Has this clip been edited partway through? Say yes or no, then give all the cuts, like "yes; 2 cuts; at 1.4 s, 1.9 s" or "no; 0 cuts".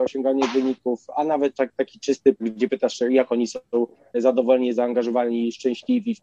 yes; 1 cut; at 2.3 s